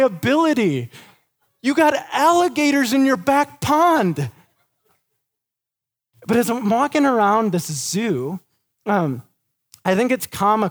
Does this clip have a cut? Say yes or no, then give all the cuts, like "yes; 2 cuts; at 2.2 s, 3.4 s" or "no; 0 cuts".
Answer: no; 0 cuts